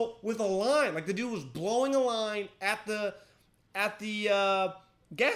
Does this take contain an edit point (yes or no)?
no